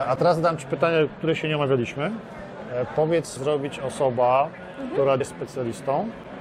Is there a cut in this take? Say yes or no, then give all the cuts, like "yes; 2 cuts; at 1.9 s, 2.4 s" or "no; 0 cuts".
yes; 3 cuts; at 1.2 s, 3.4 s, 5.2 s